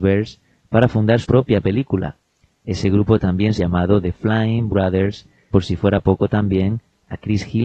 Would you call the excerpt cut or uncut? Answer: cut